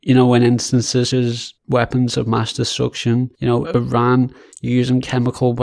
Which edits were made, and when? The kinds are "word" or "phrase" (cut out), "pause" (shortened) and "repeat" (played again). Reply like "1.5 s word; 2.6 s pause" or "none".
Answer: 1.1 s word; 1.6 s phrase; 3.3 s pause; 3.6 s phrase